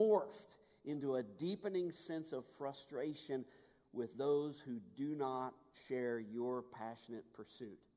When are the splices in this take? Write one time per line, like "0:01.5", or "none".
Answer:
none